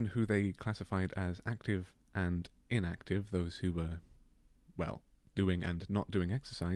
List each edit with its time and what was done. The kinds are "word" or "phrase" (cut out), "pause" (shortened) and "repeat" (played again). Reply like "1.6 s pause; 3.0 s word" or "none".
none